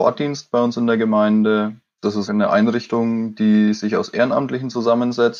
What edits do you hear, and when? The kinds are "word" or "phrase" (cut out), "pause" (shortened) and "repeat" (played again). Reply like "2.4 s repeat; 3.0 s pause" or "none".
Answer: 2.3 s word